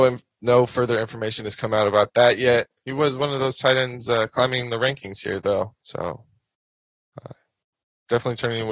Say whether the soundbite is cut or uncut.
cut